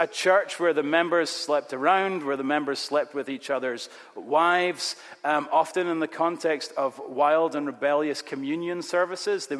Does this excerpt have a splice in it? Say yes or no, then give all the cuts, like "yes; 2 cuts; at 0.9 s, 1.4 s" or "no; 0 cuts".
no; 0 cuts